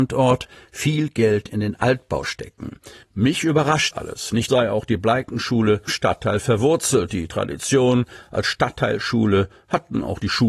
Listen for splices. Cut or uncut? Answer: cut